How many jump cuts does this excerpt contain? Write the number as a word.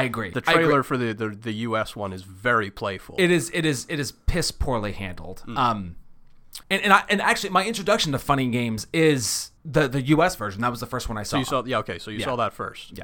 two